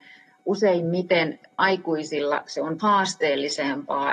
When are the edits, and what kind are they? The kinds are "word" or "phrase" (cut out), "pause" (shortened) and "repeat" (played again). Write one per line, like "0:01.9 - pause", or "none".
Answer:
0:01.6 - word
0:02.8 - word